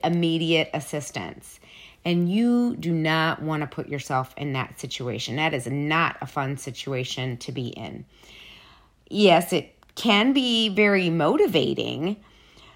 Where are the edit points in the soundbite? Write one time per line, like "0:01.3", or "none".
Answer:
none